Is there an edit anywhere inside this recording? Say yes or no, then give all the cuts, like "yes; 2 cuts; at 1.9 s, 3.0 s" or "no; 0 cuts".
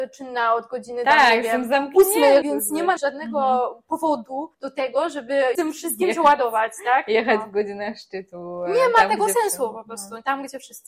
yes; 4 cuts; at 2.4 s, 3.0 s, 4.5 s, 5.5 s